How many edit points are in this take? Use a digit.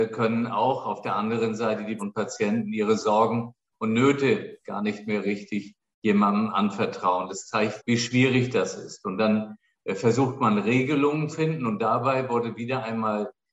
3